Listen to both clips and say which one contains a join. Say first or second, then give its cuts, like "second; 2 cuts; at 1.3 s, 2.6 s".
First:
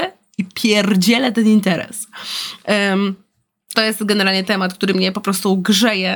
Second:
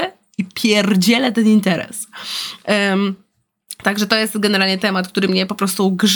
first; 1 cut; at 3.7 s